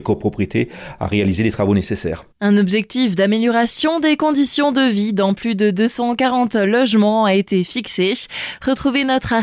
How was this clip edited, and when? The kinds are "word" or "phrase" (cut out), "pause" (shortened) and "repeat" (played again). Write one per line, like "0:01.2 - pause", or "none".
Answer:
0:02.3 - pause